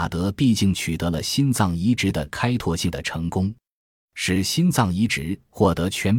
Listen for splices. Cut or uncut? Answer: uncut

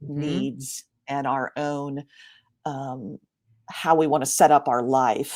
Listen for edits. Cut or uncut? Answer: uncut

